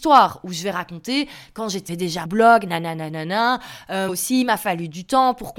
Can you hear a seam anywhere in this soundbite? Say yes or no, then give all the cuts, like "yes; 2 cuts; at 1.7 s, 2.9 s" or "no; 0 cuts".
yes; 3 cuts; at 1.9 s, 2.3 s, 4.1 s